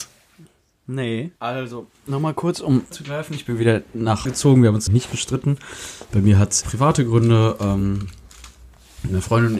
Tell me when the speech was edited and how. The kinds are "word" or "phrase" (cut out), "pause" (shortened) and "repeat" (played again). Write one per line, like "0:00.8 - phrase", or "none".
0:01.4 - pause
0:02.9 - word
0:04.2 - word
0:04.9 - word
0:06.6 - word